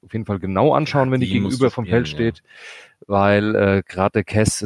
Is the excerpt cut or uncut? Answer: uncut